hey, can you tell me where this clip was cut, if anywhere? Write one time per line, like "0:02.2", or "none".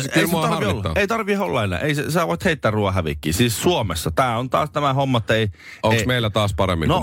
none